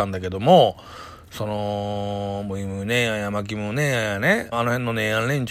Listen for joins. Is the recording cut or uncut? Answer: cut